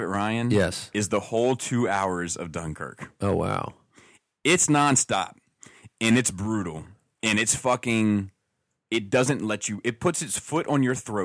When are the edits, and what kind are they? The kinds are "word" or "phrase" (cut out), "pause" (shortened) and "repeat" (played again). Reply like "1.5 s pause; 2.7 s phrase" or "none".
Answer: none